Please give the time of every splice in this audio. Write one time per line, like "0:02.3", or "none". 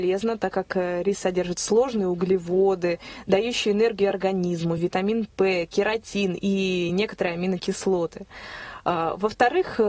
none